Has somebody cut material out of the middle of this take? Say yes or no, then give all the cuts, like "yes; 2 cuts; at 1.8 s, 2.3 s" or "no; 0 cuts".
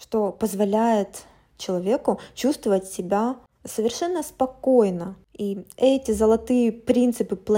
no; 0 cuts